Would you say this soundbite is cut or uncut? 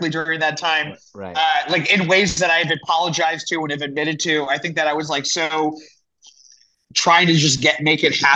uncut